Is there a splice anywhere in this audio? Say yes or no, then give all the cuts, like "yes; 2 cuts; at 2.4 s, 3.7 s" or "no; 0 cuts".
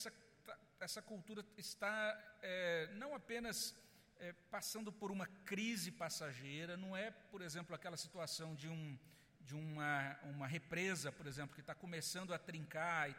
no; 0 cuts